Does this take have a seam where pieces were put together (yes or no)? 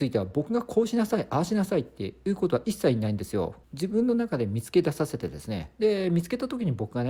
yes